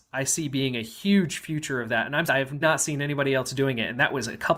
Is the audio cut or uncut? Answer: cut